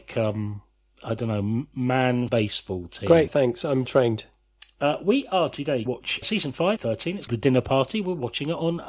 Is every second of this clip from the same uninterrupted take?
no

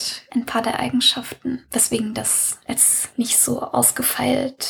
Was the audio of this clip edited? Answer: no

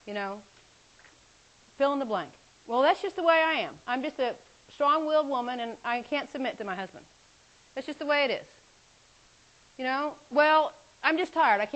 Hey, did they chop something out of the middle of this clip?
yes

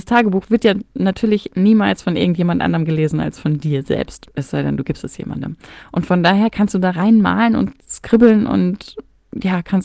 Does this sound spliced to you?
no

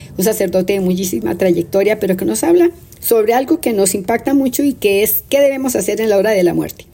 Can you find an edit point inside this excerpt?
no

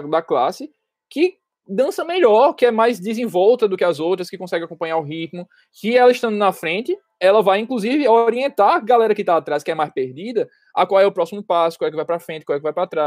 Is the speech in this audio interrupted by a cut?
no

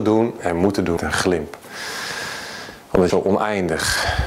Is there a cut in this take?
yes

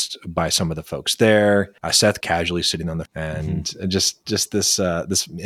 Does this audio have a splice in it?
yes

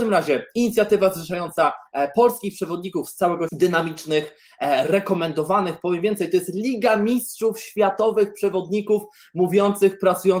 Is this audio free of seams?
no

